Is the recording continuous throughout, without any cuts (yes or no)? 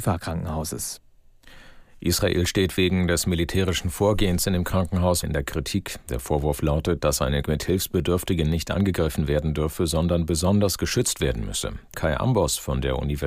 no